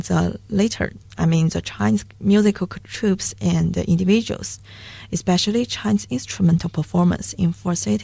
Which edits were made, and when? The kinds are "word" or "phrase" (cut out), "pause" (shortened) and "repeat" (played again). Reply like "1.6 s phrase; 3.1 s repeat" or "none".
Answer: none